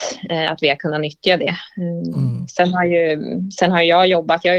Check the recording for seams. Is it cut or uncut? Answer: uncut